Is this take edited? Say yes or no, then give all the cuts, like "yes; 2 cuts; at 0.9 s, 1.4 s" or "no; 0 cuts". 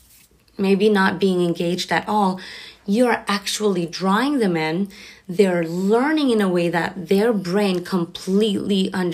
no; 0 cuts